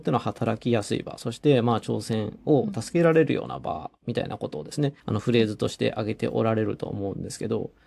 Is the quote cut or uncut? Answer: cut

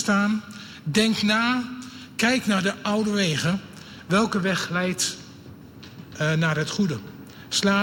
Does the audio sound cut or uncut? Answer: uncut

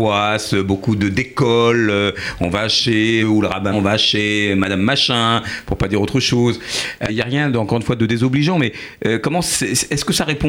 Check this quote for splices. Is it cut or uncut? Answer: cut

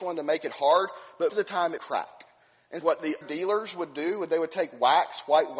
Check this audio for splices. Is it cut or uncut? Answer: cut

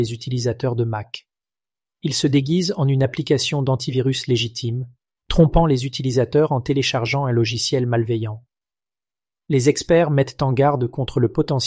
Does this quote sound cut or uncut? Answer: uncut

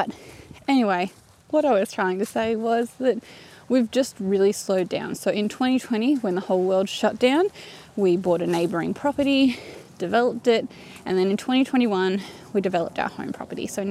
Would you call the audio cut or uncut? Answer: uncut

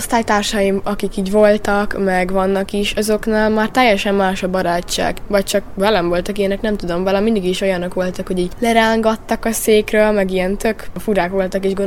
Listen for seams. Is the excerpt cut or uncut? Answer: uncut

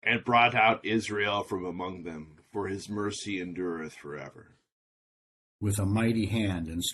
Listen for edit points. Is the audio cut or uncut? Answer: uncut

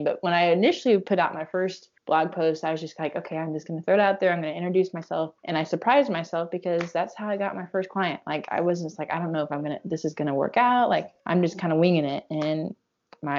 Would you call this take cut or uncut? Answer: cut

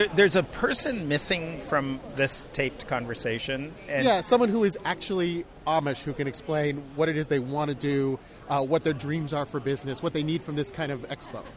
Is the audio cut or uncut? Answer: uncut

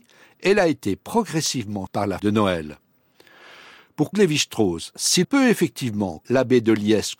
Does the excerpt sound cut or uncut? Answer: cut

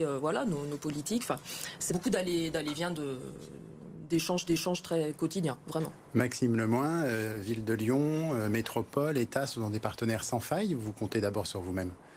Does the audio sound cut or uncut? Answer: cut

